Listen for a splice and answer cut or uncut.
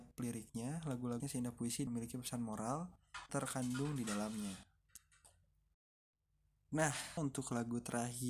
cut